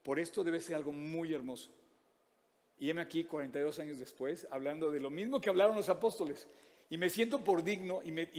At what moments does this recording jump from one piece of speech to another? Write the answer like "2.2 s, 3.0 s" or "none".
none